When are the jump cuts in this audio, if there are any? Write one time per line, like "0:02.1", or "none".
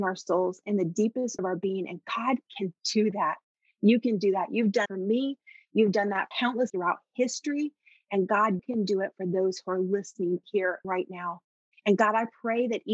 0:01.4
0:02.5
0:04.9
0:06.3
0:06.7
0:08.6
0:10.4
0:10.8